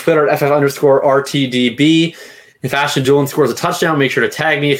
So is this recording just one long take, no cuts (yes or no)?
yes